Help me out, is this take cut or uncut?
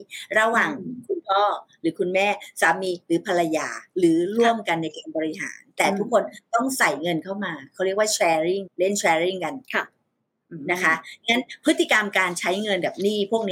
cut